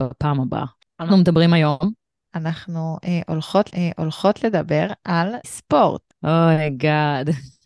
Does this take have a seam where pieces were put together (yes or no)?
yes